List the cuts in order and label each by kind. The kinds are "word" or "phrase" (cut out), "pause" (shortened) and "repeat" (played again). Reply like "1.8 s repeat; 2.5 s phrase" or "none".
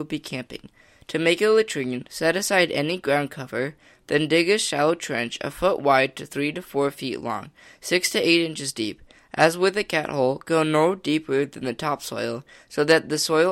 none